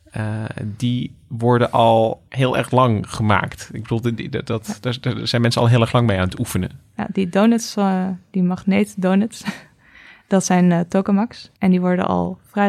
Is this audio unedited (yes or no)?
no